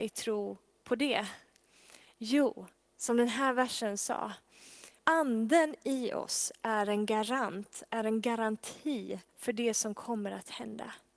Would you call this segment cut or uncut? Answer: cut